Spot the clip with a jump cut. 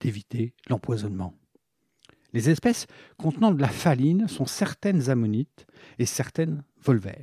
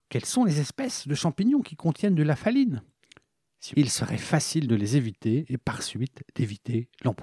second; 1 cut; at 3.7 s

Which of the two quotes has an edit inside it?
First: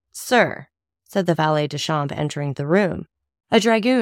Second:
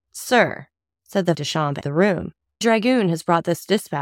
second; 3 cuts; at 1.3 s, 1.8 s, 2.6 s

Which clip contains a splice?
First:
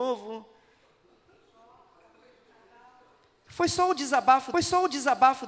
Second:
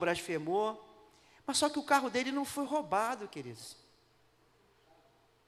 first; 1 cut; at 4.5 s

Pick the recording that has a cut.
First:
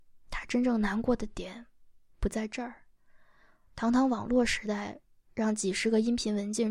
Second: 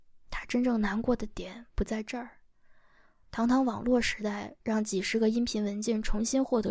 second; 2 cuts; at 1.7 s, 4.6 s

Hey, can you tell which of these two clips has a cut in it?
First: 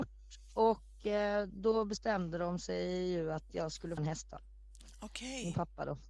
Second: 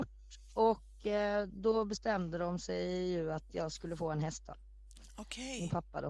first; 1 cut; at 4.0 s

